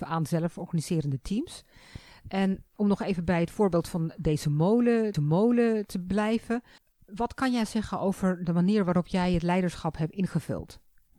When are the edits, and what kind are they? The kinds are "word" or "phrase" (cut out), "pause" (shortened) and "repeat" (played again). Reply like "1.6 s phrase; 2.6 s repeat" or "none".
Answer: 5.1 s repeat; 6.8 s pause